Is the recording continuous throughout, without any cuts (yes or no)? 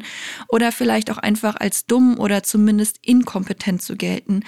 yes